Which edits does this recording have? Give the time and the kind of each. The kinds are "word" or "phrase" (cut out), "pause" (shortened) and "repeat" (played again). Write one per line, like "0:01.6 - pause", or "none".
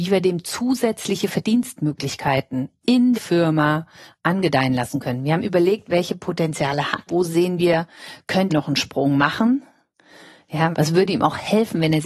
0:03.1 - word
0:07.1 - word
0:08.5 - word
0:10.7 - word